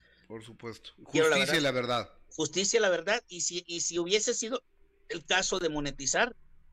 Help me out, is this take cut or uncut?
uncut